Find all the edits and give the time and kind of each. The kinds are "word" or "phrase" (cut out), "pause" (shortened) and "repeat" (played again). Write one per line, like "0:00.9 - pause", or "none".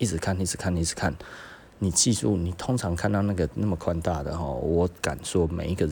none